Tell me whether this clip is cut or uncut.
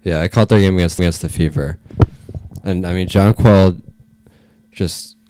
cut